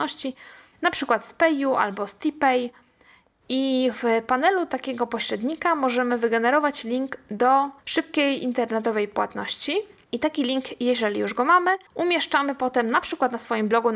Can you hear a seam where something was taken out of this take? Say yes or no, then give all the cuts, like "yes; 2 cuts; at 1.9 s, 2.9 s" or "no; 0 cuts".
yes; 2 cuts; at 7.8 s, 11.9 s